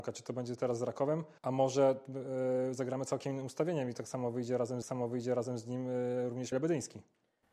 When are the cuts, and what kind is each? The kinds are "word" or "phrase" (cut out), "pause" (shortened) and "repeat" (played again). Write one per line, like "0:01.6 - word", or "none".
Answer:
0:01.4 - pause
0:04.8 - repeat
0:06.5 - word

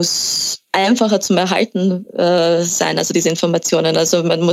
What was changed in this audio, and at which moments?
none

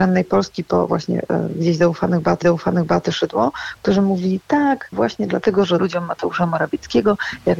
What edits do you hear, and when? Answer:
0:02.4 - repeat
0:04.9 - phrase
0:05.8 - word

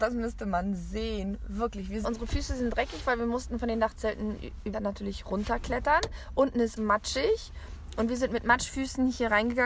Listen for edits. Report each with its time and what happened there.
0:02.0 - phrase
0:04.7 - phrase
0:06.8 - word

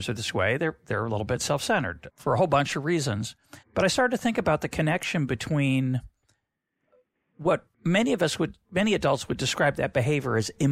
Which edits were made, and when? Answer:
0:02.1 - word
0:03.6 - pause
0:07.7 - pause

